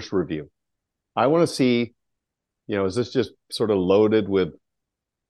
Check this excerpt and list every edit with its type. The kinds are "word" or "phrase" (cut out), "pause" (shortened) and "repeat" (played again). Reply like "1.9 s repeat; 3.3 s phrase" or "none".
none